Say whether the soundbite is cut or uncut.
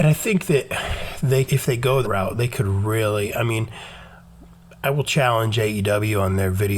cut